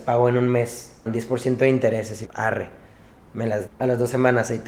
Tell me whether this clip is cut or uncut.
cut